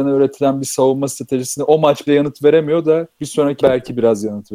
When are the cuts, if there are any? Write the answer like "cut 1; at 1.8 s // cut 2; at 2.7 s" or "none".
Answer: cut 1; at 2.1 s // cut 2; at 3.1 s // cut 3; at 3.6 s